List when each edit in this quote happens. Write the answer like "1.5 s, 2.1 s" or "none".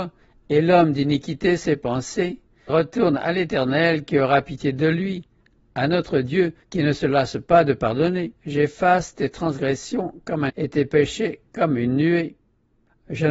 2.7 s, 6.6 s, 8.4 s, 10.5 s